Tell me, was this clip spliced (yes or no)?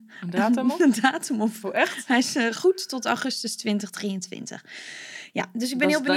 no